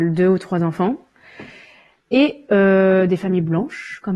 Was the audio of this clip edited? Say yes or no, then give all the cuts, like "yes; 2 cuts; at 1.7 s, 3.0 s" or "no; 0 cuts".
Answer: no; 0 cuts